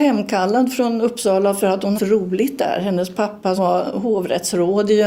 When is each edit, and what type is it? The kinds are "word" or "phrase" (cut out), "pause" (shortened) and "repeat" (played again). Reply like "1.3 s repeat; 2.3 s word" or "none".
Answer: 1.9 s word; 3.6 s word